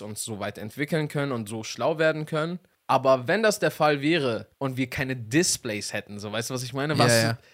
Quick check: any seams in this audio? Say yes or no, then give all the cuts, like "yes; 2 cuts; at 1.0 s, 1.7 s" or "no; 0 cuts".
yes; 1 cut; at 4.5 s